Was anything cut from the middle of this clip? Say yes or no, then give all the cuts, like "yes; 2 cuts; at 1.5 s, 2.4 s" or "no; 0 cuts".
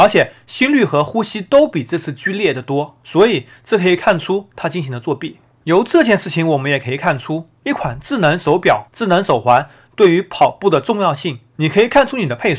no; 0 cuts